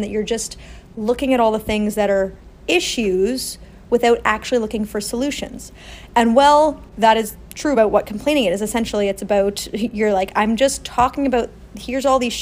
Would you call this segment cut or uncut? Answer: uncut